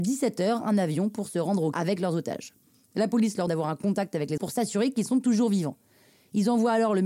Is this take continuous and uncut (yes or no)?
no